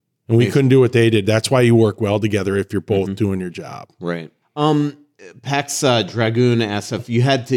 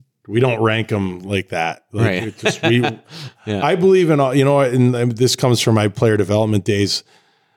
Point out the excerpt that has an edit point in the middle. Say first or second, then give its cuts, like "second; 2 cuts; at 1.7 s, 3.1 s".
first; 1 cut; at 4.4 s